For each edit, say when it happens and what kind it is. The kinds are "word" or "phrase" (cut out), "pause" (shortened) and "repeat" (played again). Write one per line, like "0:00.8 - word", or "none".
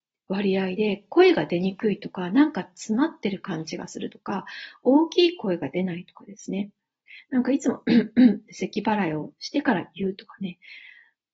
none